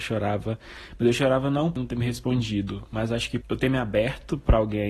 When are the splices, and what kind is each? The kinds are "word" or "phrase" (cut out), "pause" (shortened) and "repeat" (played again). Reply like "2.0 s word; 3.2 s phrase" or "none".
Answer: 1.8 s word; 3.4 s word